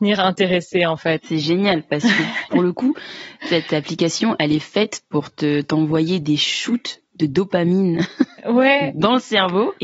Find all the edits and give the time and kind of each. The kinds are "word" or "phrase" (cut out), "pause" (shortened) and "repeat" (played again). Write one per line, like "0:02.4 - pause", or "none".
none